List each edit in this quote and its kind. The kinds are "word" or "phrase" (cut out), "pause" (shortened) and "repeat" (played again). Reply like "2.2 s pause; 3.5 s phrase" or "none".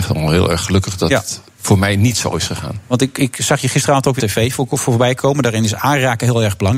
4.2 s word